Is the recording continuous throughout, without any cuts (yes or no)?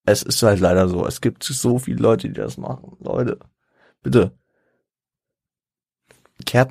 yes